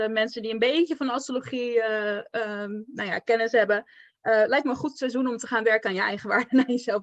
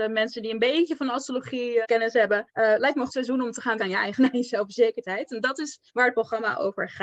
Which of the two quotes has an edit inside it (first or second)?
second